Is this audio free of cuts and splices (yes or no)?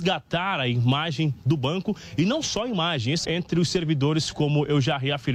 no